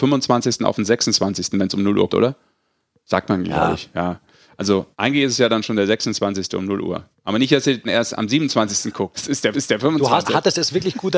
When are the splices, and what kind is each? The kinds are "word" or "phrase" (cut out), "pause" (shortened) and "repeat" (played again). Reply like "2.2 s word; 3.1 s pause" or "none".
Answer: 2.1 s word; 4.9 s pause; 7.1 s pause; 7.8 s word; 9.1 s word; 9.5 s repeat; 10.2 s word